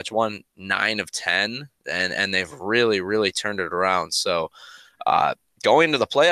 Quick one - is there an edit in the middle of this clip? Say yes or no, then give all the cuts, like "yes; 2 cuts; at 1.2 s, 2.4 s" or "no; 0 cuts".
no; 0 cuts